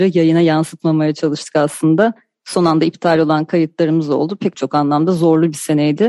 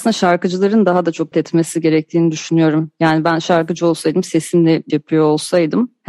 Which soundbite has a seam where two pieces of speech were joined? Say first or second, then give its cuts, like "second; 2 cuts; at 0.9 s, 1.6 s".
second; 2 cuts; at 1.3 s, 4.9 s